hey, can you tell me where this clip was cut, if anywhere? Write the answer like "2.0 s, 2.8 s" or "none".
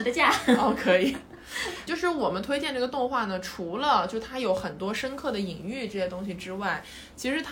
1.9 s

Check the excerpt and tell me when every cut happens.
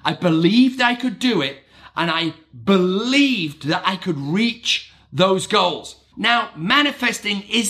none

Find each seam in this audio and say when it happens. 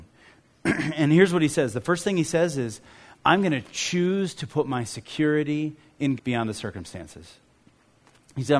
6.2 s

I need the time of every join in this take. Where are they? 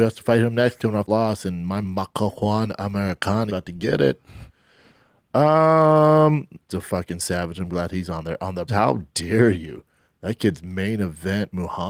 1.1 s, 1.8 s, 3.5 s, 6.7 s, 8.7 s

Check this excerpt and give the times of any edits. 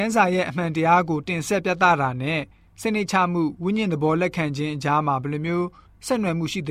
none

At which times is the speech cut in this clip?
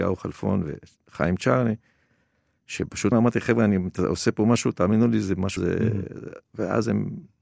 3.1 s, 5.6 s, 6.4 s

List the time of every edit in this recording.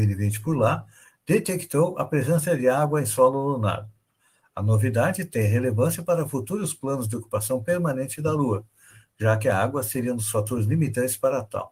none

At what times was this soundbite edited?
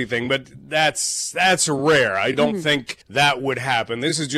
3.0 s

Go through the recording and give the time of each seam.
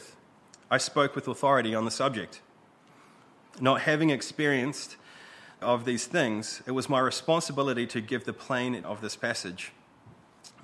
5.6 s, 8.8 s

